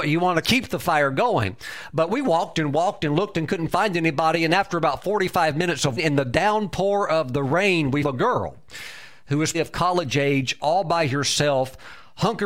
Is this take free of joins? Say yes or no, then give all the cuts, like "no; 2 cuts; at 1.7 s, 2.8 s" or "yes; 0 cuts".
no; 3 cuts; at 6.0 s, 8.0 s, 9.5 s